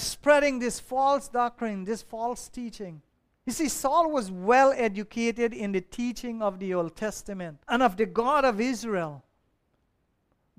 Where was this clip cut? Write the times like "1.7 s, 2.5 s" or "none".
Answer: 3.1 s, 7.6 s

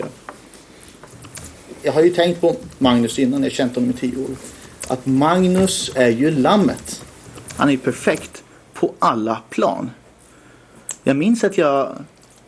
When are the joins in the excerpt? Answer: none

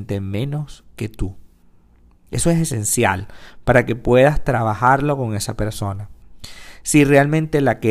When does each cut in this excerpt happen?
none

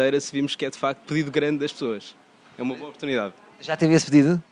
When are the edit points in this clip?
1.0 s

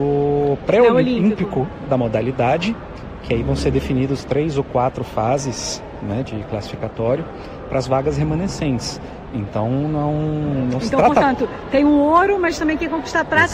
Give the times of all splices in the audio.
1.9 s, 6.2 s

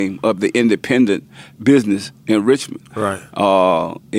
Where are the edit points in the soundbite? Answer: none

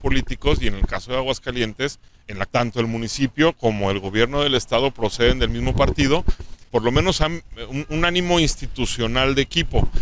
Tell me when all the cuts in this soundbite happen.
2.5 s, 6.7 s

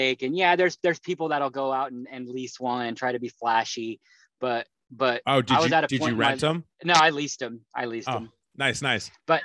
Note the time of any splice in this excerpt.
6.7 s

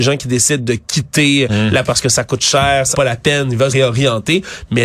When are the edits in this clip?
1.9 s, 2.9 s, 3.7 s

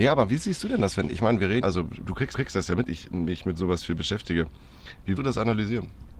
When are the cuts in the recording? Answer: 1.1 s, 1.6 s, 2.3 s, 2.9 s, 5.2 s

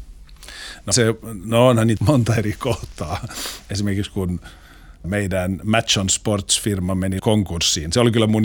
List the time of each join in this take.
0.9 s, 2.0 s, 5.0 s, 7.2 s

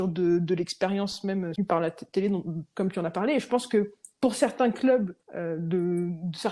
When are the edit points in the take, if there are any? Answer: 1.6 s, 5.2 s

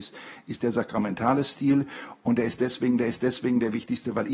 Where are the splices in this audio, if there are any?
3.0 s

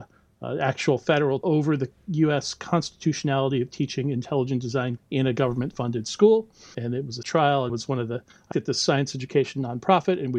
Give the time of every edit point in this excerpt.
1.4 s, 5.0 s, 6.7 s, 7.2 s, 7.7 s, 8.5 s

